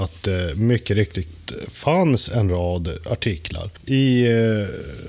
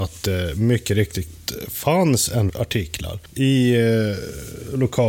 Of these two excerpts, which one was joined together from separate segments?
second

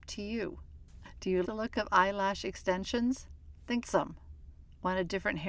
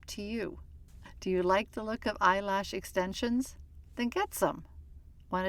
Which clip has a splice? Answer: first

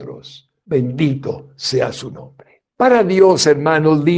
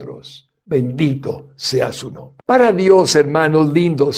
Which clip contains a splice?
second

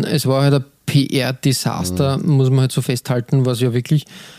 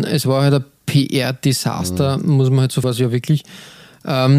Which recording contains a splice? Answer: second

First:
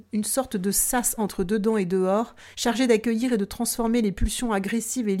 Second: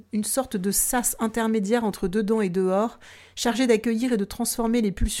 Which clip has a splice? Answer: first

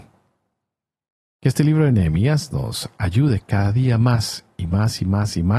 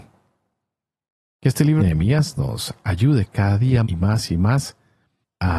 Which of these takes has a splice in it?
second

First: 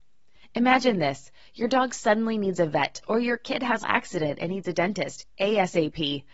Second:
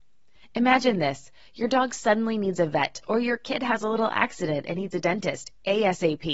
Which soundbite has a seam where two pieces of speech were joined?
first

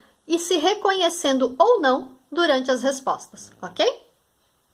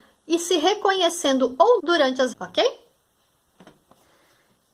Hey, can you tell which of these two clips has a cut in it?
second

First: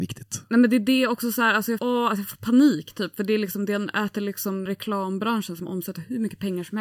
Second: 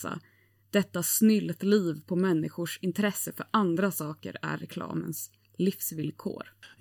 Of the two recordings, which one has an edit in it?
first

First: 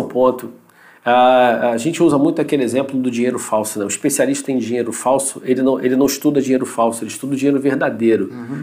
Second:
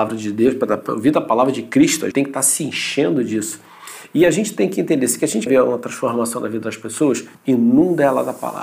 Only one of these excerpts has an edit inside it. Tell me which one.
second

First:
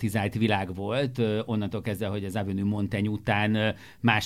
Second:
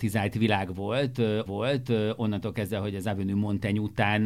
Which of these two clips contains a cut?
second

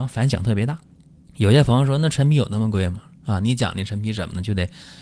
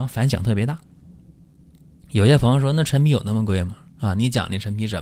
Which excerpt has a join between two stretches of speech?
first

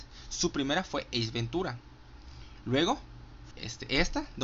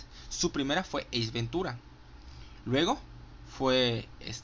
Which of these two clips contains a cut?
first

